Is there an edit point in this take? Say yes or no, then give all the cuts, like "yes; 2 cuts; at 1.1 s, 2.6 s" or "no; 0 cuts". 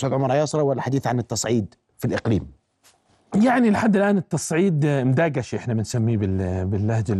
no; 0 cuts